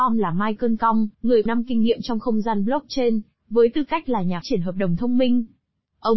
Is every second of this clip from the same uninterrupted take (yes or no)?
no